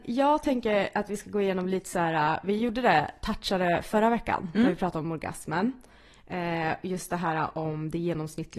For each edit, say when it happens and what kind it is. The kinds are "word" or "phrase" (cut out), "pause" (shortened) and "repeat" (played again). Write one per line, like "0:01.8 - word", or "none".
none